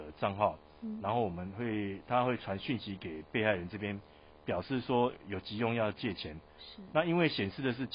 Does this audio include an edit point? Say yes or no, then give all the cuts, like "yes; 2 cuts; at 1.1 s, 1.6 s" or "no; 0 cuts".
no; 0 cuts